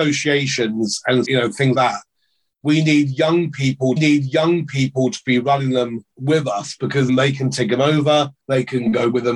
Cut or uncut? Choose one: cut